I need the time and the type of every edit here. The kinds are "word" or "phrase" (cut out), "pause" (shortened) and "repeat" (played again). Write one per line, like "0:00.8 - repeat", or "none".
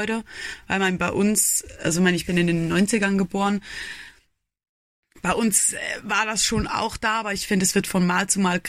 none